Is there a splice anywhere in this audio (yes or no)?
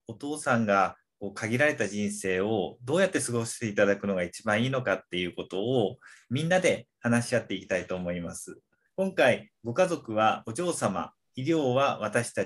yes